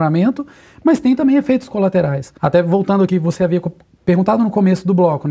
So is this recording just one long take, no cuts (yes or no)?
no